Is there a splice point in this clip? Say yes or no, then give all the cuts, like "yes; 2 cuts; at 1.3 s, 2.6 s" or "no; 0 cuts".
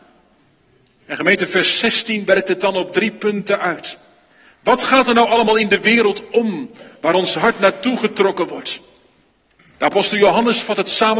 no; 0 cuts